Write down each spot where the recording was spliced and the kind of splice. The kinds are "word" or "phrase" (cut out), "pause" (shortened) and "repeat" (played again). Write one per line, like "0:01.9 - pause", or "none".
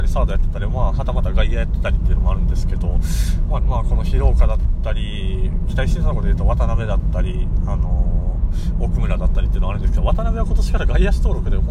0:03.6 - phrase